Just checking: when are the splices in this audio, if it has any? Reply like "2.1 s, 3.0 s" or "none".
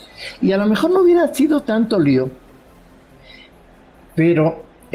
none